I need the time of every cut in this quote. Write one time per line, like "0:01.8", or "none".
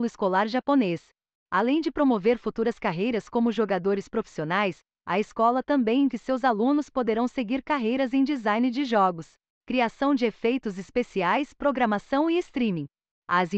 0:06.1